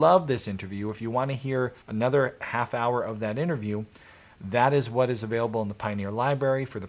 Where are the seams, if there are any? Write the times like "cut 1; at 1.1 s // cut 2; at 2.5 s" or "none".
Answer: cut 1; at 1.8 s